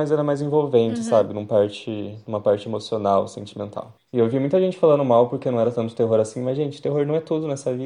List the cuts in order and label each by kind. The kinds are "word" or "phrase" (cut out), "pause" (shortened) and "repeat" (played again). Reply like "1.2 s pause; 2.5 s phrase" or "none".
none